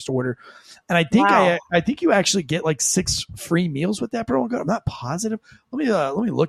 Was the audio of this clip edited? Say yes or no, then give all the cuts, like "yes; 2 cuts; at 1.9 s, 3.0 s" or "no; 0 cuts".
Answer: no; 0 cuts